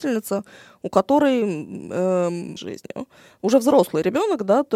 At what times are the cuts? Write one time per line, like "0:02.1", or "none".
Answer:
0:02.6